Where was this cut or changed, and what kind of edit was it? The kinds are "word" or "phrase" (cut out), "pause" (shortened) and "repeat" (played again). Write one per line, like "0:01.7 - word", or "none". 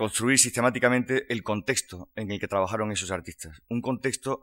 none